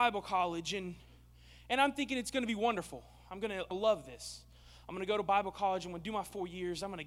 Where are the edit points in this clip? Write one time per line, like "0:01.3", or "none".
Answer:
0:03.7